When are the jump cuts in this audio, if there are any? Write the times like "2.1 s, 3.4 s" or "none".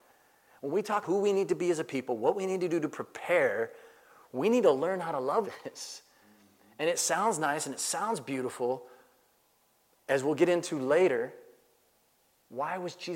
1.0 s, 5.4 s